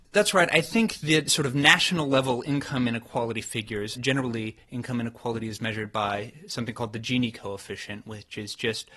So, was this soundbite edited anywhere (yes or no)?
yes